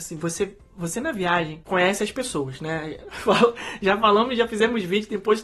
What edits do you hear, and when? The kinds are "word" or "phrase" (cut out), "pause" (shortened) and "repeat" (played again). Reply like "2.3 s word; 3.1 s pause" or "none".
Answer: none